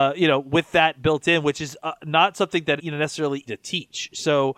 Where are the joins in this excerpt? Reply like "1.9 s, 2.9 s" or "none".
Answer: 2.8 s, 3.5 s